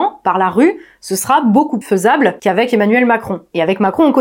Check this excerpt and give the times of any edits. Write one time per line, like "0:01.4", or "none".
0:01.8